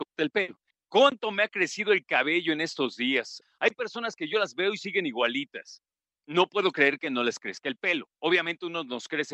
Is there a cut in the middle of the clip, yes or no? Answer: no